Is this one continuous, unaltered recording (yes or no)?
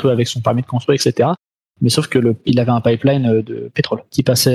yes